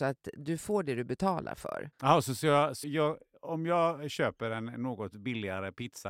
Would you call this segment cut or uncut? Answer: cut